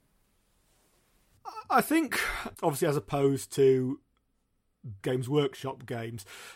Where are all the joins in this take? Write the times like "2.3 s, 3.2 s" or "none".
2.5 s, 5.0 s